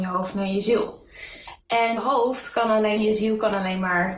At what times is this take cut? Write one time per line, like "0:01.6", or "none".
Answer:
0:02.0
0:03.0